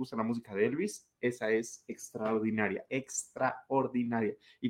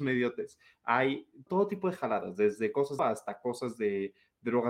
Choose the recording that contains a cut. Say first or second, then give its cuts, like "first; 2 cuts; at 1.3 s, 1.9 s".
second; 2 cuts; at 1.5 s, 3.0 s